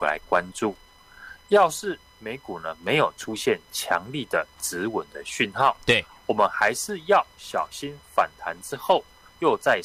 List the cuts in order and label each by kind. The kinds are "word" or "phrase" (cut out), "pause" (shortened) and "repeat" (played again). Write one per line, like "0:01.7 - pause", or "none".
none